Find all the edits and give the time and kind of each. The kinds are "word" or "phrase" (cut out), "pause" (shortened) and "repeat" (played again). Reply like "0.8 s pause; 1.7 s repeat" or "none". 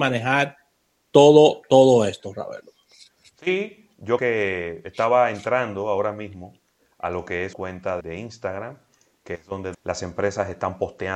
4.2 s word; 7.5 s word; 8.0 s word; 9.7 s word